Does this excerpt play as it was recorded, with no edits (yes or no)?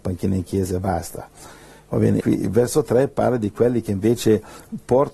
no